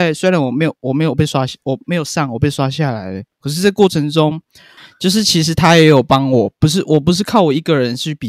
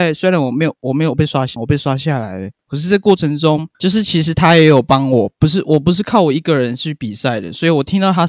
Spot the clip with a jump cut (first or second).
second